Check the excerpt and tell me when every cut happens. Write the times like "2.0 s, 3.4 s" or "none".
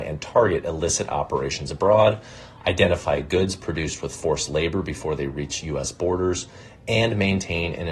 none